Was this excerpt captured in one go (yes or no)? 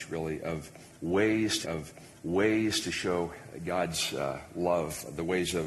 no